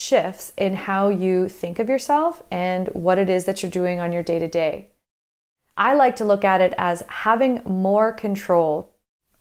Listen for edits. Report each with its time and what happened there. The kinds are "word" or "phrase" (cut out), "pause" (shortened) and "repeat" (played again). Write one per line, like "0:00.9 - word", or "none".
none